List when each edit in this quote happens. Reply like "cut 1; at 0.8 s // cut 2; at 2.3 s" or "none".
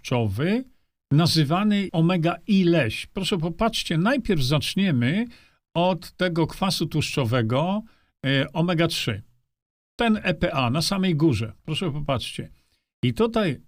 cut 1; at 1.9 s